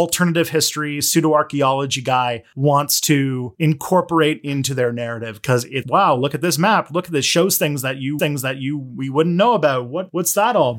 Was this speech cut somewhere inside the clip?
yes; 2 cuts; at 5.8 s, 8.2 s

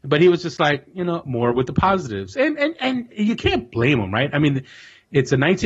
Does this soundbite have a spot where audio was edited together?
no; 0 cuts

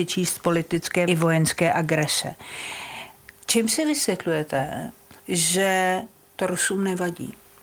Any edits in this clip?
yes; 2 cuts; at 1.1 s, 5.2 s

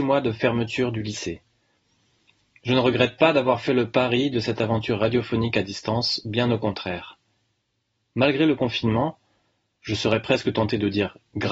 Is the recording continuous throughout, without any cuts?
yes; 0 cuts

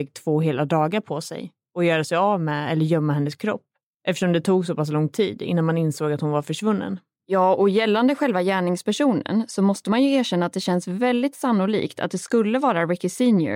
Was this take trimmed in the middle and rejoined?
yes; 1 cut; at 7.2 s

